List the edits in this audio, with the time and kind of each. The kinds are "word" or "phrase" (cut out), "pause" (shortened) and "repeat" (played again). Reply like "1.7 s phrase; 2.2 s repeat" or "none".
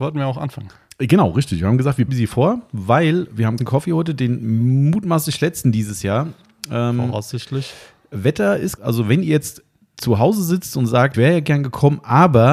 2.1 s phrase; 3.6 s word; 8.8 s word; 11.1 s word